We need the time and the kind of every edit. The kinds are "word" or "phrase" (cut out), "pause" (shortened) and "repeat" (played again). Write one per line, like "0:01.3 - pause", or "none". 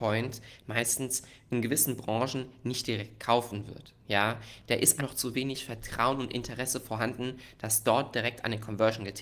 0:05.0 - word